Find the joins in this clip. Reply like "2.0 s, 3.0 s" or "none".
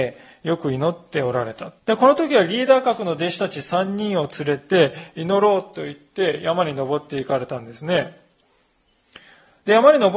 1.8 s